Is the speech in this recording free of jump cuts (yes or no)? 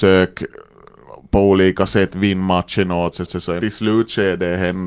no